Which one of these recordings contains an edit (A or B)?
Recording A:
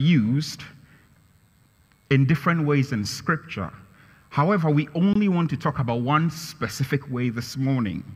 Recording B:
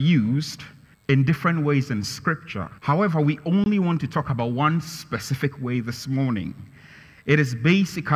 B